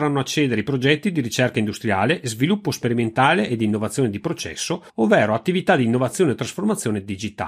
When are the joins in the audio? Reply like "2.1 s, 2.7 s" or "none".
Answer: 4.9 s